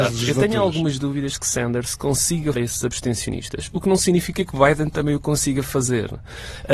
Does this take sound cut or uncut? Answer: cut